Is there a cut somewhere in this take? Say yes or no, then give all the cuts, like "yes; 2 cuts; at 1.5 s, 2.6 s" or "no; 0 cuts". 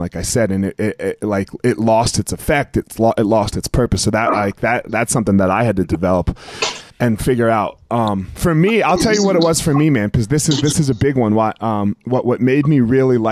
yes; 1 cut; at 6.9 s